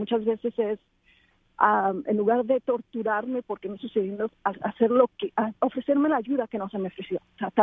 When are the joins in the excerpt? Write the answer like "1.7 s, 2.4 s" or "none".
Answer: 3.8 s